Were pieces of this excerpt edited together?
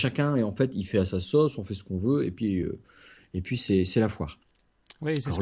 no; 0 cuts

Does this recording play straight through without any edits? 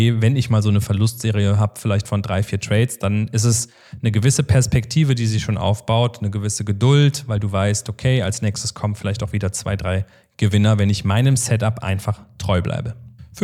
yes; 0 cuts

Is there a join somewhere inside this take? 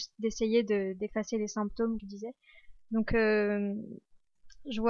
yes; 1 cut; at 2.0 s

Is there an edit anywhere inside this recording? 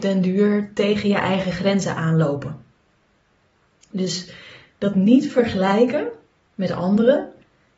no; 0 cuts

